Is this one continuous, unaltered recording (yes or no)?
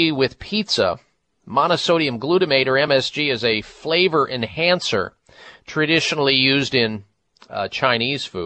yes